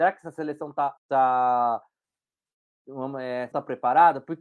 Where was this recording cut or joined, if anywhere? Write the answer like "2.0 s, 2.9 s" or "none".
1.0 s, 3.5 s

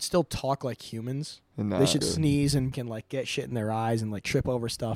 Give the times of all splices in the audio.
1.5 s, 2.0 s, 2.7 s

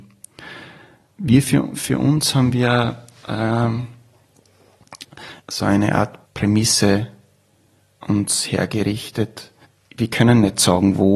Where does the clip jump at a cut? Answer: 5.4 s, 6.3 s, 9.6 s

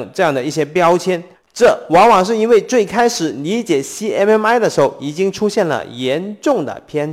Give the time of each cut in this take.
1.3 s

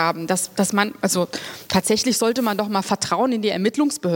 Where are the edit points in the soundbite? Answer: none

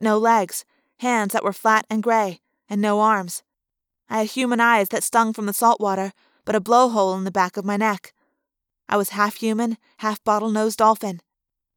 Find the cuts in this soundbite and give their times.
5.0 s

